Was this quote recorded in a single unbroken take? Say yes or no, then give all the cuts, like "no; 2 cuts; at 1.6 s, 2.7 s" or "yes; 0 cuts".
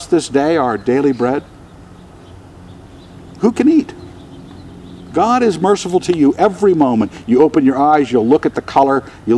yes; 0 cuts